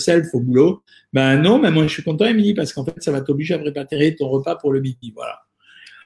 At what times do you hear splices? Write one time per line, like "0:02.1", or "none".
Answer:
none